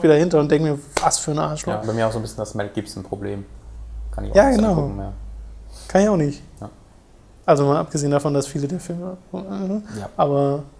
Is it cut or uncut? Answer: cut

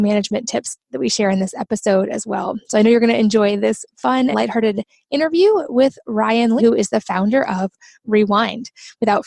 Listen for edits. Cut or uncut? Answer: cut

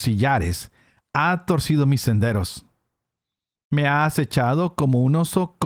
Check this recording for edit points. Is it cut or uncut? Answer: uncut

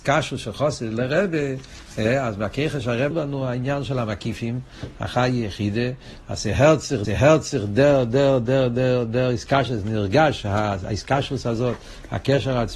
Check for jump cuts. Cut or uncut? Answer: cut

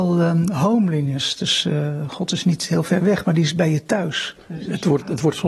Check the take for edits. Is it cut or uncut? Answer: uncut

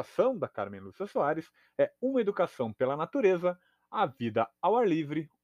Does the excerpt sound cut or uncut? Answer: uncut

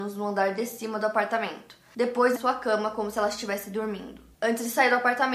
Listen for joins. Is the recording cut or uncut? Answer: cut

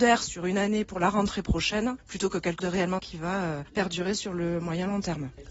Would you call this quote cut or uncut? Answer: cut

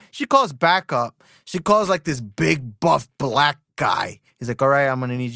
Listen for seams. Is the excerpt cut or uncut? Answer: cut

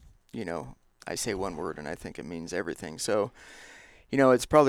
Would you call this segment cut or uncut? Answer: uncut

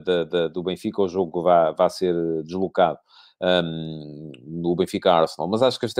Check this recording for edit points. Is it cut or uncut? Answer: uncut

